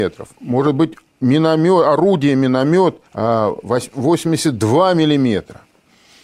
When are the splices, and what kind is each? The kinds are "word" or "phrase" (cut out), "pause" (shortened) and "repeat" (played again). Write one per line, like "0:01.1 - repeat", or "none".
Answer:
0:03.1 - pause